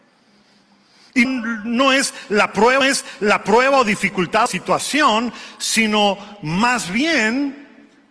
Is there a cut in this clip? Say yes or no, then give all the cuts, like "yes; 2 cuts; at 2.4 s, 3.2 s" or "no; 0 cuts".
yes; 3 cuts; at 1.2 s, 2.8 s, 4.5 s